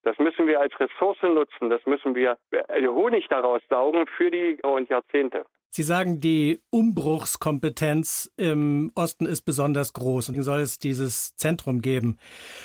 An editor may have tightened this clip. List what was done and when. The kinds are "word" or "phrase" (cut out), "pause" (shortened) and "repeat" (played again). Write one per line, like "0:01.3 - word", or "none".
0:04.6 - phrase
0:10.3 - word